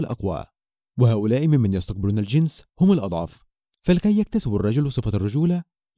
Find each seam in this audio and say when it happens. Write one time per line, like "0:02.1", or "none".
none